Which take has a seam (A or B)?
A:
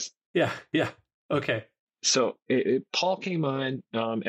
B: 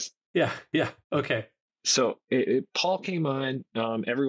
B